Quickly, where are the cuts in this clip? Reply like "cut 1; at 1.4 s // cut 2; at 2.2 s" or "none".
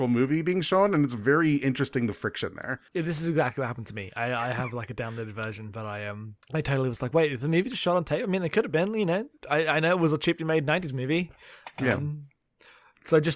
cut 1; at 2.9 s // cut 2; at 6.4 s